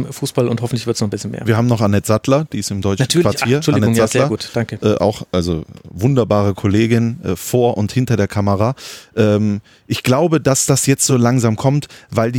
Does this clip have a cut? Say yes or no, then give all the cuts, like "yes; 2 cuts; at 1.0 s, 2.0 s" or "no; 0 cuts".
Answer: no; 0 cuts